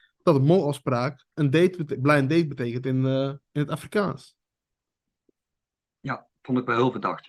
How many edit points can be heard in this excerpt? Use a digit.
2